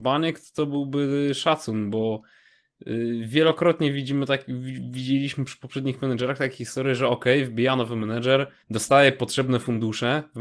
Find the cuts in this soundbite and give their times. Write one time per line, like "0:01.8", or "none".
0:08.6